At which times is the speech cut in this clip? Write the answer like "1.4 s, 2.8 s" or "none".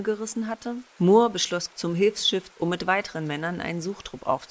0.9 s, 1.7 s, 2.5 s